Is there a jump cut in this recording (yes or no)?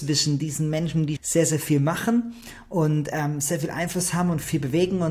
yes